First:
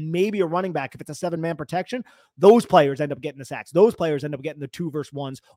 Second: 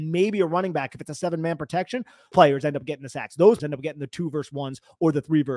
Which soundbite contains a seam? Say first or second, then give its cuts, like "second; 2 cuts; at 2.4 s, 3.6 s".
second; 2 cuts; at 2.3 s, 3.6 s